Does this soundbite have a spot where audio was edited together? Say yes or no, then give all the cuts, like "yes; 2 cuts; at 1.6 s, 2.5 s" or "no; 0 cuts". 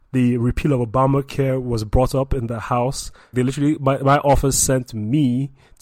yes; 1 cut; at 3.3 s